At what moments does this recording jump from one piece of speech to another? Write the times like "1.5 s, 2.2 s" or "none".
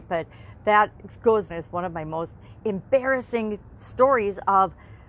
1.5 s